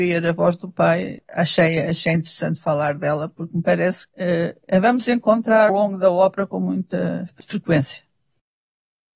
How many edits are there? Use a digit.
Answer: 3